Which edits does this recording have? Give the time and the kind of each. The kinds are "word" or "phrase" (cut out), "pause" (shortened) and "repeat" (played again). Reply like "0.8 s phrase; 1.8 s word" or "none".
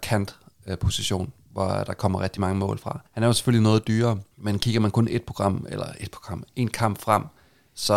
3.1 s pause; 4.3 s pause